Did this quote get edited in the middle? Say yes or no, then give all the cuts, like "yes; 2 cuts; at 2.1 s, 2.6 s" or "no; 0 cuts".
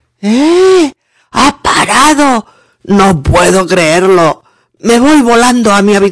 no; 0 cuts